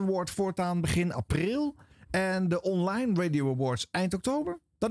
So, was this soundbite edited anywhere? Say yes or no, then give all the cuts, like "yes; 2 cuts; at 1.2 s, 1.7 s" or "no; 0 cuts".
no; 0 cuts